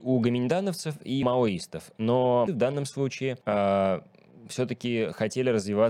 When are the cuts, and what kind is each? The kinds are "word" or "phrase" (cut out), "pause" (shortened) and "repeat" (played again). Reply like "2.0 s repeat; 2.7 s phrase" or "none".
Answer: 1.2 s word; 2.5 s word; 3.4 s pause

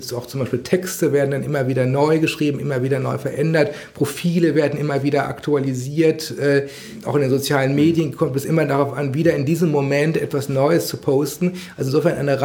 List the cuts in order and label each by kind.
none

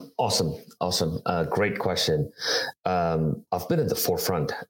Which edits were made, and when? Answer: 3.5 s pause

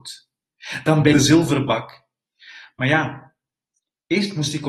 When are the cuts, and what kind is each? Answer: 1.1 s phrase

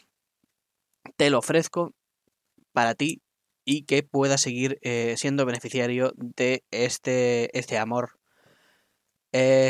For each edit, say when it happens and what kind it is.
none

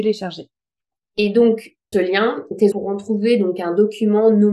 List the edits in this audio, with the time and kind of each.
1.9 s phrase; 2.7 s word

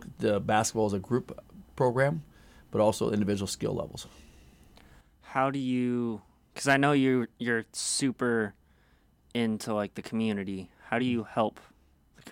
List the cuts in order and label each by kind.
none

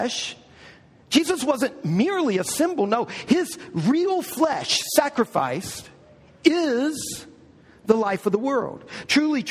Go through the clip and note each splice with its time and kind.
none

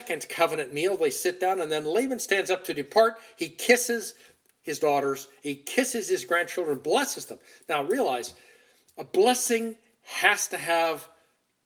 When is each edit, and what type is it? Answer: none

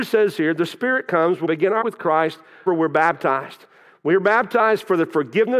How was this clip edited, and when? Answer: 1.4 s word; 1.8 s word; 2.7 s word

